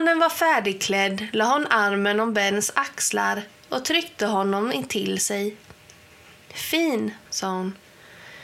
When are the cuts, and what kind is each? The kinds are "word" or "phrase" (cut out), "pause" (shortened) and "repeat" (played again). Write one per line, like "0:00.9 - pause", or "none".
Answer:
0:07.2 - pause